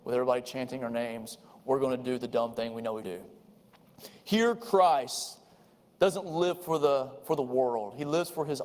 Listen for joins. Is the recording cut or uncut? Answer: cut